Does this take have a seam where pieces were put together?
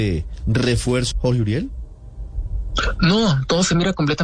yes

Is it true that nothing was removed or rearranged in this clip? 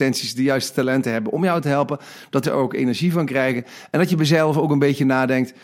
no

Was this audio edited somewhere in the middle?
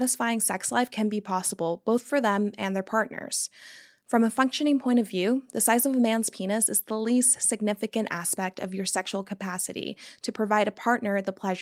no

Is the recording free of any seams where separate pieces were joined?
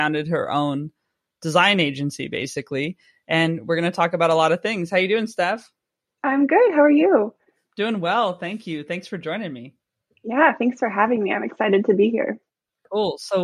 yes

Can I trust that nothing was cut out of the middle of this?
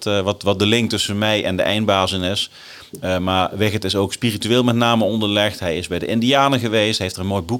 yes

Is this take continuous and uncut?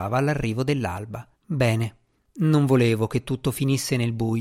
no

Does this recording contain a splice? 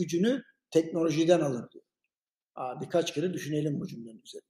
no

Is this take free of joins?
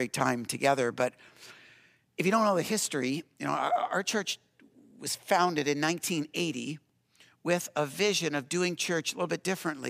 yes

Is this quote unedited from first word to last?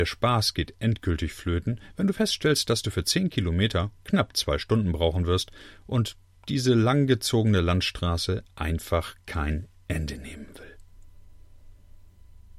yes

